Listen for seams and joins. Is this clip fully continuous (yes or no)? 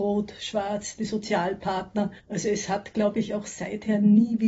no